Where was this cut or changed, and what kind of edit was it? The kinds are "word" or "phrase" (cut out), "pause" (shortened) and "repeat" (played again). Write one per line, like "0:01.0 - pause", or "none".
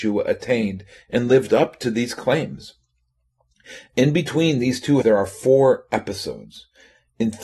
0:05.0 - word